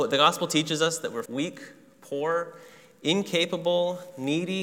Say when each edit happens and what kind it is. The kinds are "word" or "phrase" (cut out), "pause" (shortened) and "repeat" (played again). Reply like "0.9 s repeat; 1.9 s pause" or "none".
1.3 s word